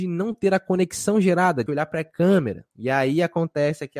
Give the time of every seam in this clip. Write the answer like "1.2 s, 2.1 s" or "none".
1.7 s, 2.7 s